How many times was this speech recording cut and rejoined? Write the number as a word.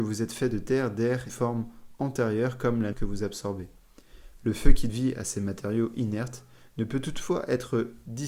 three